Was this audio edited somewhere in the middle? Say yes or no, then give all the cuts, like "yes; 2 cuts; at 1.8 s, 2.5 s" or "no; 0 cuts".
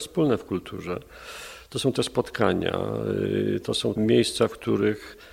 yes; 2 cuts; at 2.0 s, 4.0 s